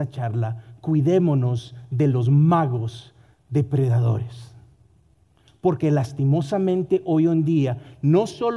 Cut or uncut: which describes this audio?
uncut